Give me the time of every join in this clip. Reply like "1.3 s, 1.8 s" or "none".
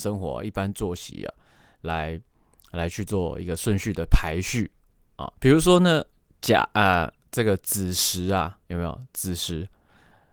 5.4 s